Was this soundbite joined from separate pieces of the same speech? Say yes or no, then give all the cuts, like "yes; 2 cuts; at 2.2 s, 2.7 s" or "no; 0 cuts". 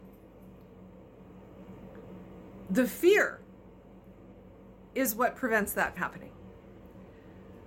yes; 1 cut; at 6.0 s